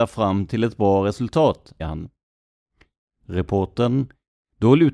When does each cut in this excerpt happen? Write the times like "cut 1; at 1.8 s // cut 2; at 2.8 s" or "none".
cut 1; at 1.8 s

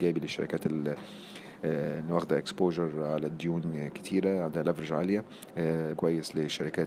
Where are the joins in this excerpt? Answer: cut 1; at 5.9 s

